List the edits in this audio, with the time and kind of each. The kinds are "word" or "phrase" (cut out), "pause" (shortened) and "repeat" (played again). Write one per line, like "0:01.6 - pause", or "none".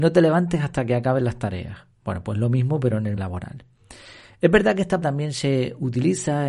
0:01.9 - pause
0:03.2 - word
0:05.0 - word